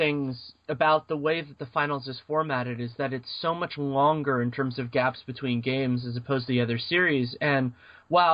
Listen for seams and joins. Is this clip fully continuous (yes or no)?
yes